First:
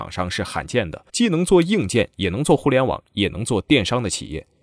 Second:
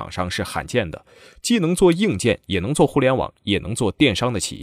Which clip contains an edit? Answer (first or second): first